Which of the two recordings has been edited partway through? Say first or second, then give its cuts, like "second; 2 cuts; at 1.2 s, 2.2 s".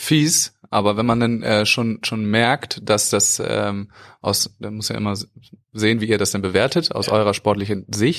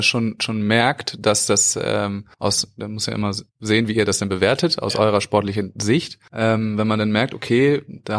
second; 3 cuts; at 2.3 s, 3.5 s, 6.3 s